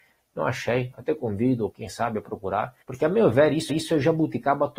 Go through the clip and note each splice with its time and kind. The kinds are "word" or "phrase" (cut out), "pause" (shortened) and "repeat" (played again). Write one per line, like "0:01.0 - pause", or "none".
0:01.7 - word
0:02.8 - pause
0:03.7 - repeat